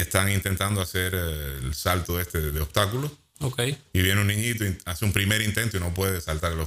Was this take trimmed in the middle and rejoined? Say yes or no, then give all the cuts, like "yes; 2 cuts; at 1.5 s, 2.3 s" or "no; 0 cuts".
yes; 1 cut; at 3.8 s